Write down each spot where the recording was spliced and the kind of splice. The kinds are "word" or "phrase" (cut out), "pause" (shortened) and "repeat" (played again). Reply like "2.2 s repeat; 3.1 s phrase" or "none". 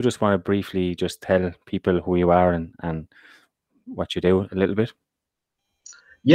none